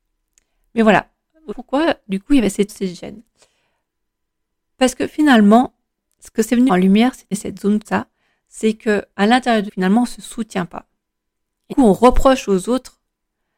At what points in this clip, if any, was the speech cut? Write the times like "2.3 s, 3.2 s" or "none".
1.5 s, 2.7 s, 6.7 s, 7.3 s, 7.8 s, 9.1 s, 9.7 s, 11.7 s